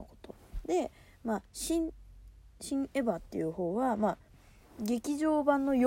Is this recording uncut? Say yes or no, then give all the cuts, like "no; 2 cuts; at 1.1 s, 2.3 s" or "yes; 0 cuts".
yes; 0 cuts